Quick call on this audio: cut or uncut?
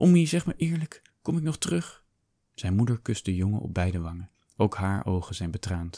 uncut